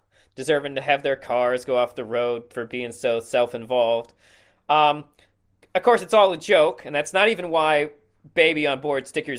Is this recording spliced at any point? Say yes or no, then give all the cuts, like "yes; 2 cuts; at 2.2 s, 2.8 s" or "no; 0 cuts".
no; 0 cuts